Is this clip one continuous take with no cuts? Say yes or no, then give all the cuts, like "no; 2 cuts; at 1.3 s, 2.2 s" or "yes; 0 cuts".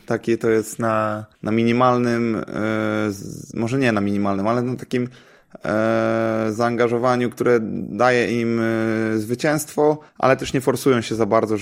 no; 2 cuts; at 1.3 s, 10.1 s